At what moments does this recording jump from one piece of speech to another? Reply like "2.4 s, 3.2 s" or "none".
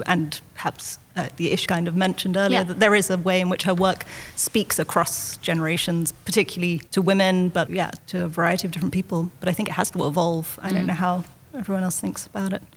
1.7 s, 6.9 s, 7.7 s, 8.0 s